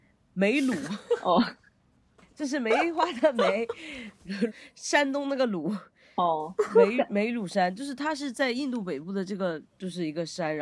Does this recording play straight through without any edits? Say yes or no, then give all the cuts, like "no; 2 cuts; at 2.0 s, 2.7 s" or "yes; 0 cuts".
no; 1 cut; at 4.5 s